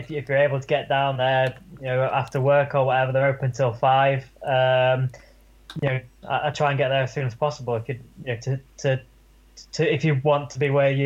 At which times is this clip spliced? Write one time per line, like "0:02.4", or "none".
none